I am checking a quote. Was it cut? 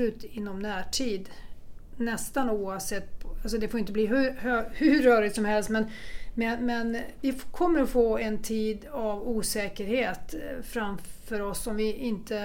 no; 0 cuts

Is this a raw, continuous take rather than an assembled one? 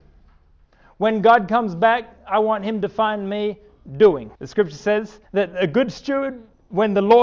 no; 2 cuts; at 4.3 s, 5.2 s

